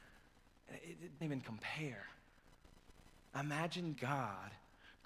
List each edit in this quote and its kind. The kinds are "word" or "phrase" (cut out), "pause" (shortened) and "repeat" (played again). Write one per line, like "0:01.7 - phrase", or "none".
0:01.2 - word
0:03.9 - word

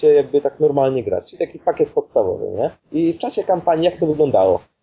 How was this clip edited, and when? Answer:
0:02.8 - pause

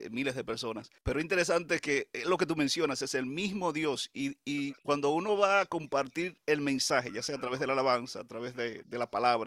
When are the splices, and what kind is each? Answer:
0:01.0 - pause
0:04.8 - pause

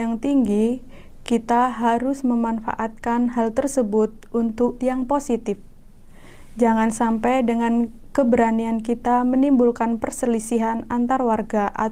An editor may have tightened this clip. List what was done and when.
0:04.8 - word

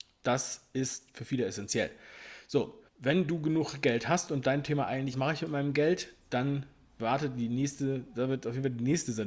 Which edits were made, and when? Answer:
0:02.9 - pause
0:05.1 - phrase

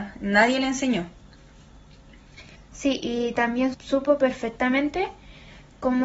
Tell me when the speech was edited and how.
0:02.6 - pause
0:03.7 - word

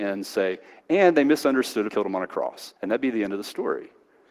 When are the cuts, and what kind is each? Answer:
0:01.9 - word
0:02.8 - pause

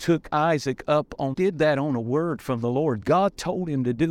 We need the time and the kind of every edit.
0:01.3 - phrase

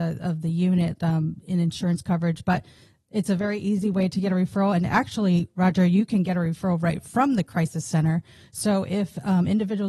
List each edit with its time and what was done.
none

